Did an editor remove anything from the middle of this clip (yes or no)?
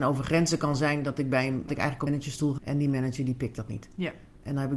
yes